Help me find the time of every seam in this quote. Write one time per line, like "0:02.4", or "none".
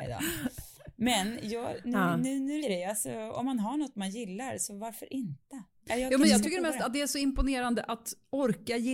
0:02.6